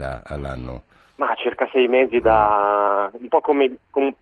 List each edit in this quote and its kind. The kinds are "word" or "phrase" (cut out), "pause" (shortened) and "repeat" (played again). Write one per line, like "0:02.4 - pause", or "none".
none